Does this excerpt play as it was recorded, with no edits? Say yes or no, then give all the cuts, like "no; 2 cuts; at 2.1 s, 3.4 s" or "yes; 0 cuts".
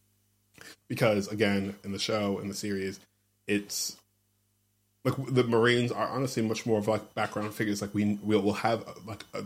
yes; 0 cuts